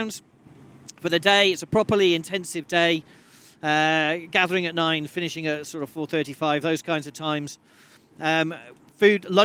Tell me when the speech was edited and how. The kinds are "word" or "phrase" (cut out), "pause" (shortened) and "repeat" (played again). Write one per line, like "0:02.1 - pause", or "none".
none